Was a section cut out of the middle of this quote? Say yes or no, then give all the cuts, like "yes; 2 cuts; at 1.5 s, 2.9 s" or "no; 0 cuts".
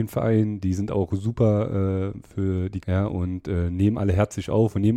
yes; 1 cut; at 2.8 s